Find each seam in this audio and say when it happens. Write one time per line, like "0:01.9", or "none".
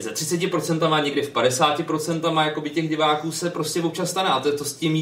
none